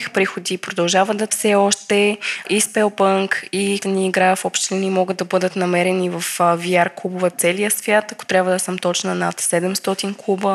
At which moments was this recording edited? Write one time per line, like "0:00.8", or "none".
0:01.3
0:03.8
0:07.3